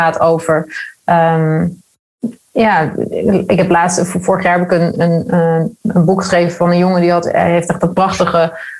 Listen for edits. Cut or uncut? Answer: uncut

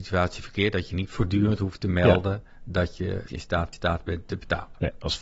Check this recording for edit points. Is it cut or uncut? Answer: cut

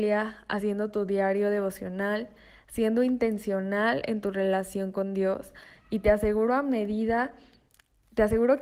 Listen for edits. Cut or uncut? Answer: uncut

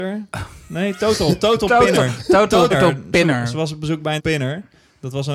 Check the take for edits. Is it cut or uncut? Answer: cut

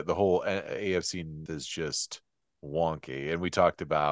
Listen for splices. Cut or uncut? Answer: cut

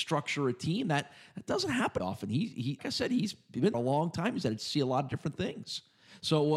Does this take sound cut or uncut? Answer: cut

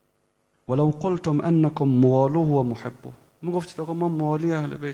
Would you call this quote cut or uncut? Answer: uncut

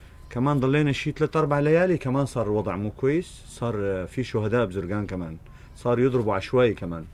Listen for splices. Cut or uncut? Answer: uncut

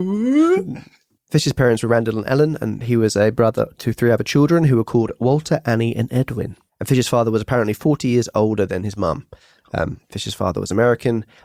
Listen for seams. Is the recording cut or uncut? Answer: uncut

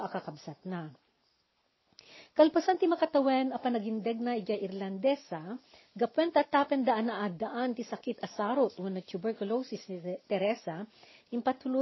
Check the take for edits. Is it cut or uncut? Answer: uncut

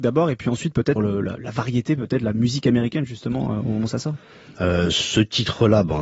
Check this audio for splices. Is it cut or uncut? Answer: cut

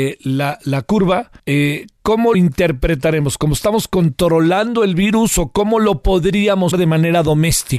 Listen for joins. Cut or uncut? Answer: cut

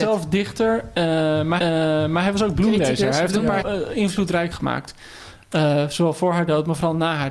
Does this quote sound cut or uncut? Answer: cut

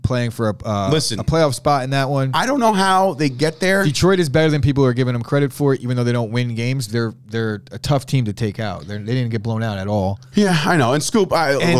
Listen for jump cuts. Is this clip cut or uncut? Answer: uncut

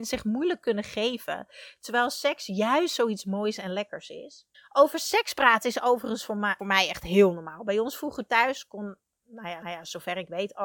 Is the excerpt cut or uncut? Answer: cut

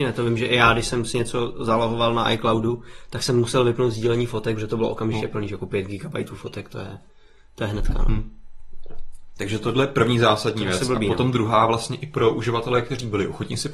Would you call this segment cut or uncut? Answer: uncut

